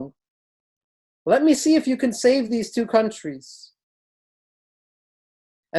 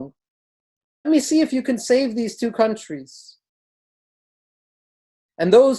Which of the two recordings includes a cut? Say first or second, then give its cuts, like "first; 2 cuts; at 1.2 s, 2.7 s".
second; 1 cut; at 1.0 s